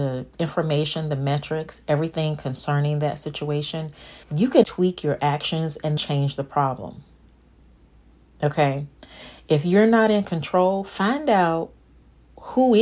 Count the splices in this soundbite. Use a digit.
3